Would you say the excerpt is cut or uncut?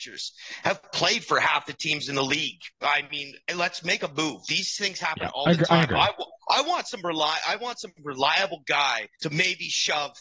cut